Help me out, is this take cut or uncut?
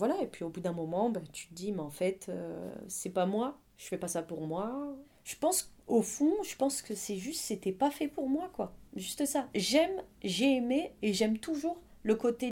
cut